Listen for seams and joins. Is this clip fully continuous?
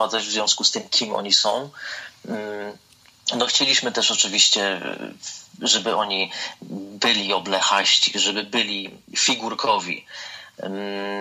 yes; 0 cuts

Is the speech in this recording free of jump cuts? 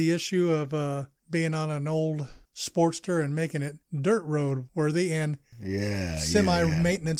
yes; 0 cuts

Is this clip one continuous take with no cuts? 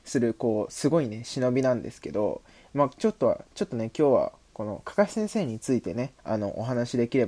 no; 1 cut; at 6.2 s

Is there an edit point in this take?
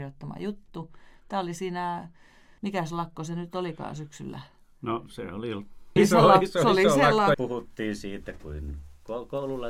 yes; 3 cuts; at 2.6 s, 6.0 s, 7.3 s

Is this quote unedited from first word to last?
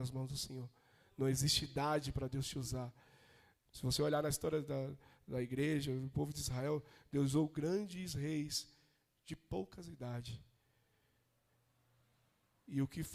yes; 0 cuts

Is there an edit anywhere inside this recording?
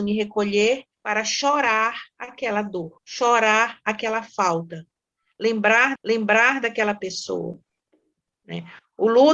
yes; 3 cuts; at 0.9 s, 3.0 s, 6.0 s

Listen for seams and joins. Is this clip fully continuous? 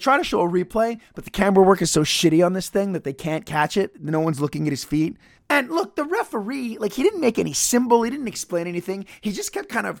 no; 1 cut; at 5.4 s

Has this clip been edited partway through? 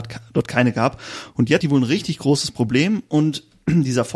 yes; 1 cut; at 1.6 s

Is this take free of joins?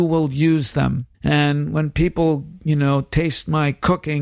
no; 1 cut; at 1.1 s

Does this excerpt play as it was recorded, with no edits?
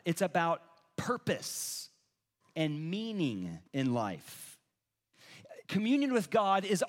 no; 2 cuts; at 3.7 s, 5.6 s

